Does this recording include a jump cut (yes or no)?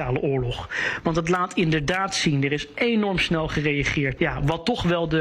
yes